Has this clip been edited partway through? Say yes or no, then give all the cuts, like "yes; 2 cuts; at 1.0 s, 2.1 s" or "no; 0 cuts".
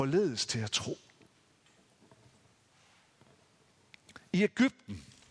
no; 0 cuts